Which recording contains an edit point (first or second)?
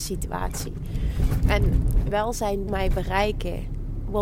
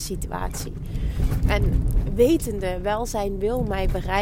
first